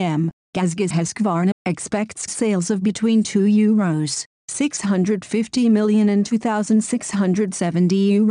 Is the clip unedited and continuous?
no; 3 cuts; at 0.9 s, 1.5 s, 2.3 s

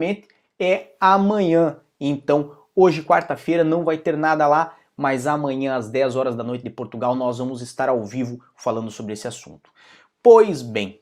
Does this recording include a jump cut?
no; 0 cuts

